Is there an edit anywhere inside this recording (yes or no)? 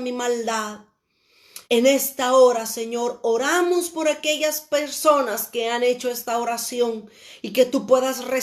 yes